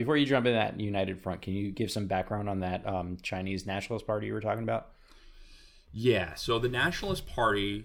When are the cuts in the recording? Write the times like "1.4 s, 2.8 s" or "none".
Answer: none